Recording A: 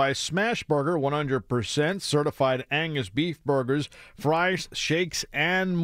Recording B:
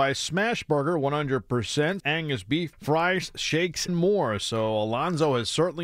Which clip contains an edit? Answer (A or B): B